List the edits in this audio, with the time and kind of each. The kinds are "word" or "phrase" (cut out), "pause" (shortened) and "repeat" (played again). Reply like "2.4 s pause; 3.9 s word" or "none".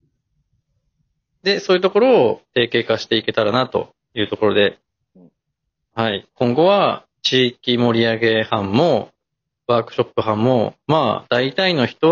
none